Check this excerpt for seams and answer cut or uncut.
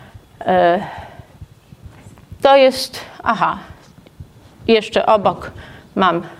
uncut